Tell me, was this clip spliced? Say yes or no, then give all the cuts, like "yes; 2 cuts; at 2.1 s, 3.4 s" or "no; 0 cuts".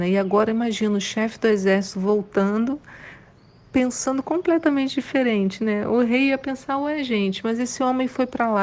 no; 0 cuts